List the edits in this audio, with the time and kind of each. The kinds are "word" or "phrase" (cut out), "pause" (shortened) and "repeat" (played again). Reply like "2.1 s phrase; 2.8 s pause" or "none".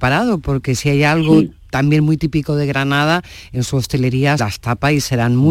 4.4 s word